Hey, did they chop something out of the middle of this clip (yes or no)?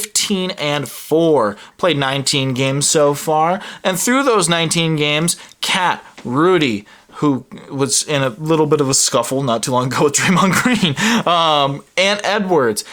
no